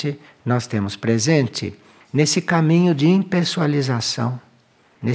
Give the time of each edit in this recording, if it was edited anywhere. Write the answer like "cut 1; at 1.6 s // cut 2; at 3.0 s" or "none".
none